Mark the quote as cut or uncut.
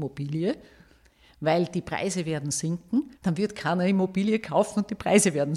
cut